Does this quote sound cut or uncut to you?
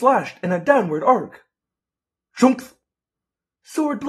uncut